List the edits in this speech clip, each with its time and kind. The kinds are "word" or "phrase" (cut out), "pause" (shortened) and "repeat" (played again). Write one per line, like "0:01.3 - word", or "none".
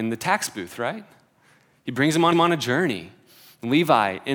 0:02.3 - repeat